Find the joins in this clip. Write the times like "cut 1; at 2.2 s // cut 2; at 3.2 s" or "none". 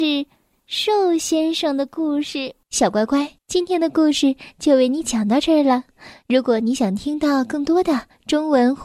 cut 1; at 3.4 s